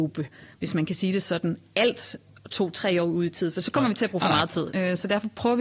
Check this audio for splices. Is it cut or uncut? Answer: uncut